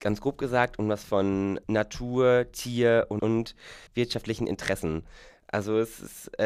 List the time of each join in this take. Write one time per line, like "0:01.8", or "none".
0:01.1
0:01.6
0:03.2
0:03.9